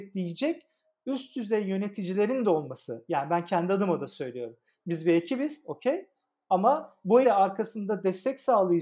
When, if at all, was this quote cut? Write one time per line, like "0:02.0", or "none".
0:07.2

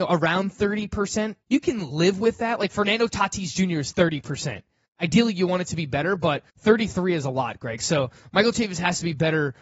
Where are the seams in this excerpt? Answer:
0:01.4
0:06.5

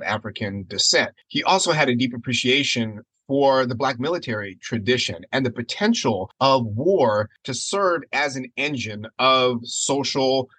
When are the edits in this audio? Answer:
none

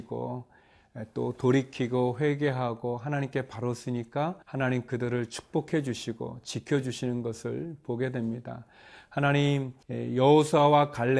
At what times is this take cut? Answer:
0:04.4
0:09.8

